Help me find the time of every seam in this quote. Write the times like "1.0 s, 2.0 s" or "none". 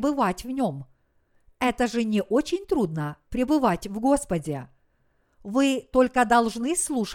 none